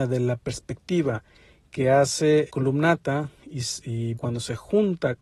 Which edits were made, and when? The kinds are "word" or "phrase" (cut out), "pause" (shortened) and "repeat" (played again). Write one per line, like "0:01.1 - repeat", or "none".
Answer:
0:02.5 - word
0:04.1 - word